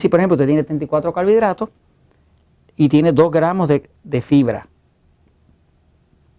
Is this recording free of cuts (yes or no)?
yes